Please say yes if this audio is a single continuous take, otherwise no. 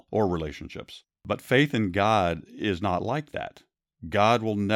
no